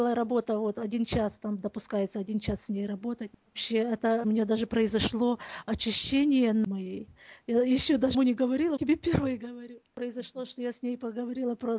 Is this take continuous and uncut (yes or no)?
no